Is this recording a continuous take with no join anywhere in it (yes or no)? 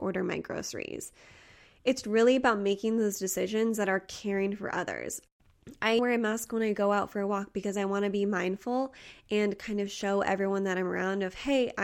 no